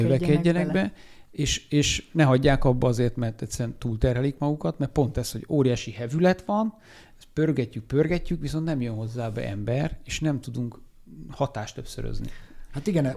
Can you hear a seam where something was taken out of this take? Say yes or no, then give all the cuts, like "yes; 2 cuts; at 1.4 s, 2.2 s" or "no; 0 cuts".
no; 0 cuts